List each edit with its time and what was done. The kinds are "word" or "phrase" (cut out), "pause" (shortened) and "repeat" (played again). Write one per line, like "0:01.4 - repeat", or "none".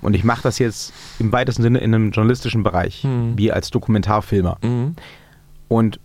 none

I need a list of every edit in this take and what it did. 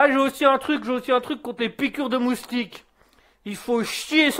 none

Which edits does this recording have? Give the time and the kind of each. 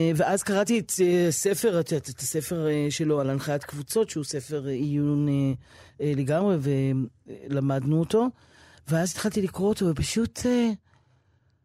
none

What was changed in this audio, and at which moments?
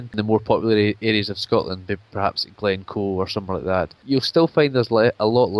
none

